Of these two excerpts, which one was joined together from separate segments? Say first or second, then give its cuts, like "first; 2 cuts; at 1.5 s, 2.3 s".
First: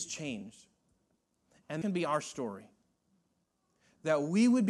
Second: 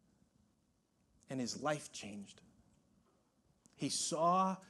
first; 1 cut; at 1.8 s